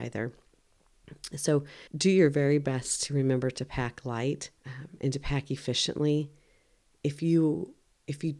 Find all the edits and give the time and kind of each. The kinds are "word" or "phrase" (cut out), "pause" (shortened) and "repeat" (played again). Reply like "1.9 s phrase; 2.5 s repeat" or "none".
1.9 s pause; 4.6 s pause